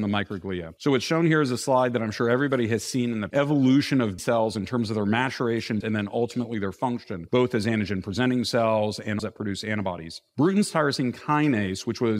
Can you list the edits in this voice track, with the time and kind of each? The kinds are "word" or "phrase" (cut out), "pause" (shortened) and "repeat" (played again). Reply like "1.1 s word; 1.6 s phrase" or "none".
3.3 s phrase; 4.2 s word; 5.8 s word; 9.2 s phrase